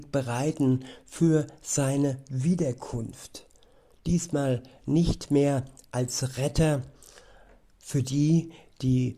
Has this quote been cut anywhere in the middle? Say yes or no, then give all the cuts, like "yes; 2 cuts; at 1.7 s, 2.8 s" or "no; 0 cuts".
no; 0 cuts